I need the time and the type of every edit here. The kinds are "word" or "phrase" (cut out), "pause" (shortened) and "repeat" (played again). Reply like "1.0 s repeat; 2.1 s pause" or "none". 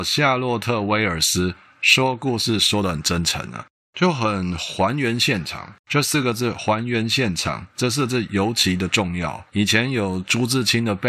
5.8 s pause; 9.5 s pause